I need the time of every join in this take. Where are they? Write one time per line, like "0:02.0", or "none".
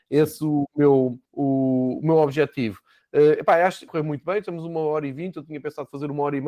0:01.2
0:03.9